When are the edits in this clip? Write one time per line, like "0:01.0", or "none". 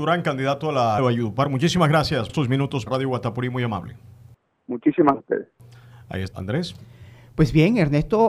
0:01.0
0:02.3
0:02.9
0:05.1
0:06.3

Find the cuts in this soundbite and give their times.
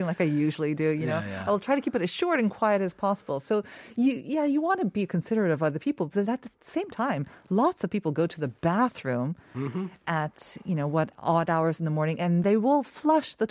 none

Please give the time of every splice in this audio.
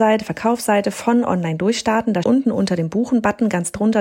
0:02.2

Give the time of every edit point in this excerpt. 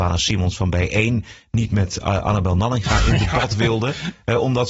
none

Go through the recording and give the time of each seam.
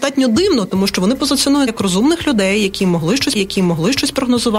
0:01.7
0:03.3

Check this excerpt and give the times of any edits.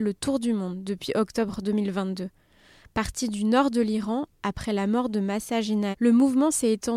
0:05.9

